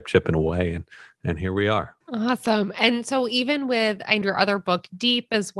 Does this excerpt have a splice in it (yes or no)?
yes